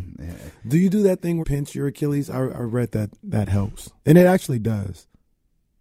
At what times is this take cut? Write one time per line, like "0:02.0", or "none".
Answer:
0:01.4
0:04.0